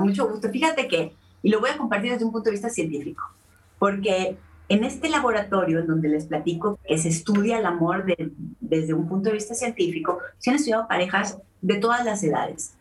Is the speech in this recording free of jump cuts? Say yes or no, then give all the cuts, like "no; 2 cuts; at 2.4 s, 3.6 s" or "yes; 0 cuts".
no; 1 cut; at 6.8 s